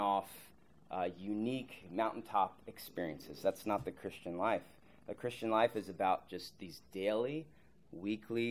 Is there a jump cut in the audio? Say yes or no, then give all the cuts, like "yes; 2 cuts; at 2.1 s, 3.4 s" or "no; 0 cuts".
no; 0 cuts